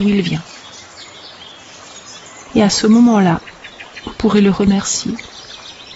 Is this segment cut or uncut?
uncut